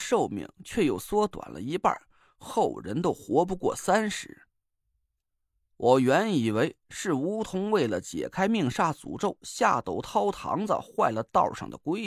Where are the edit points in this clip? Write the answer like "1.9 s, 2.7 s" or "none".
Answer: none